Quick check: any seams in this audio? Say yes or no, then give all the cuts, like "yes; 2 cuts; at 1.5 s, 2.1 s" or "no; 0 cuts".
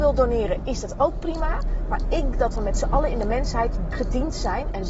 yes; 2 cuts; at 2.3 s, 3.9 s